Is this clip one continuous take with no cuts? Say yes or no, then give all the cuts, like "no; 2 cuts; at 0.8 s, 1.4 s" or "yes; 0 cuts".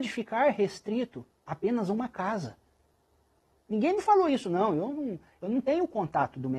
no; 1 cut; at 1.4 s